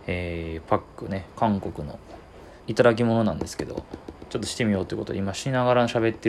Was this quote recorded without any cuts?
no; 1 cut; at 2.6 s

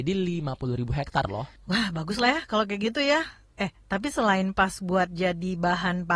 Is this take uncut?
yes; 0 cuts

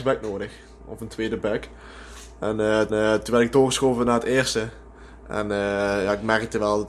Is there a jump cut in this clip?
yes; 1 cut; at 2.9 s

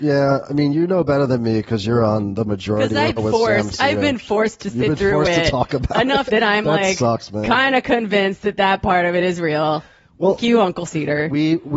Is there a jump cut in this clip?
yes; 4 cuts; at 3.2 s, 6.3 s, 10.4 s, 10.9 s

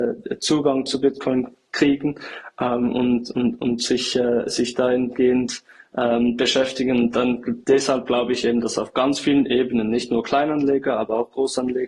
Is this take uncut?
yes; 0 cuts

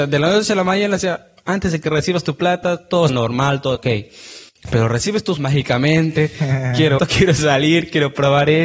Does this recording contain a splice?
yes; 4 cuts; at 3.1 s, 3.7 s, 5.4 s, 7.0 s

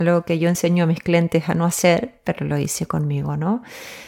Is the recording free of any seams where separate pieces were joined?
yes; 0 cuts

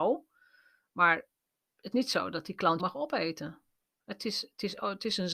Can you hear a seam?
yes; 2 cuts; at 1.9 s, 2.8 s

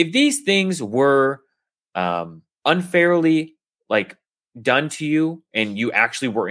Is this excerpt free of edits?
yes; 0 cuts

